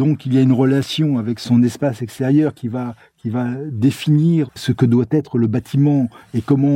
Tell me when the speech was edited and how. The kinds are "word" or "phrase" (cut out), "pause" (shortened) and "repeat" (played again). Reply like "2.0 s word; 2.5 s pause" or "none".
4.5 s word

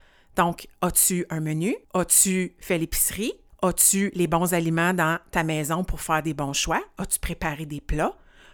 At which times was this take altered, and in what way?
1.8 s pause; 3.5 s pause

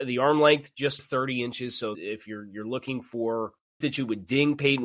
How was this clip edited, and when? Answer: 1.0 s word; 1.9 s word; 3.8 s word

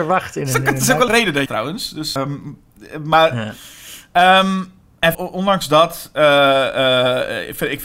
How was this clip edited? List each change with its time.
1.1 s word; 1.5 s phrase; 2.2 s word; 5.1 s word

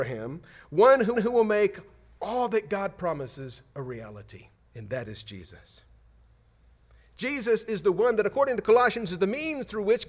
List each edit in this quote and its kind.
1.1 s repeat; 4.5 s pause

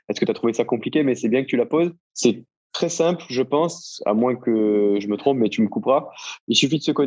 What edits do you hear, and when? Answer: 2.0 s pause

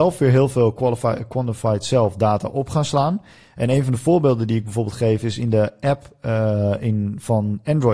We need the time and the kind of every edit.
none

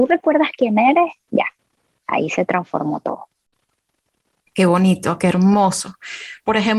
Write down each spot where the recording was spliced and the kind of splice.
none

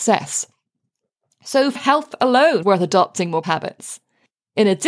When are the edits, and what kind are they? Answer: 1.8 s word; 2.6 s word; 3.4 s word

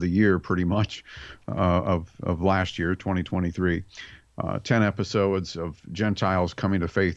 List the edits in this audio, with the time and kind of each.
none

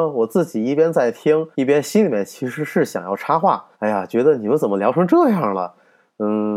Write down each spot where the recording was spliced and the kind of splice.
1.5 s pause; 3.7 s pause

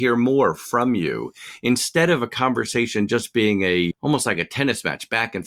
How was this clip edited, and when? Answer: 3.9 s word

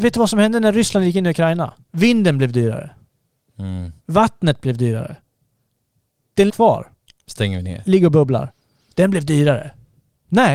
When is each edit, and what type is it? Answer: 1.8 s pause; 4.0 s pause; 6.5 s phrase

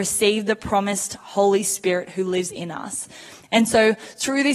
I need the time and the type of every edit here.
none

